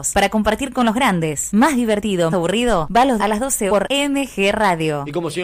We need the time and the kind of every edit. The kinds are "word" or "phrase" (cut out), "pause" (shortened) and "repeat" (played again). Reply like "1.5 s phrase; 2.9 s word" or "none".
2.3 s word; 3.2 s word; 3.7 s word